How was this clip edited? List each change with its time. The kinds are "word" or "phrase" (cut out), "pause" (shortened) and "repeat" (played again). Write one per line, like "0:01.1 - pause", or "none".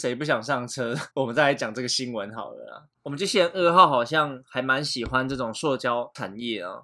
0:01.1 - pause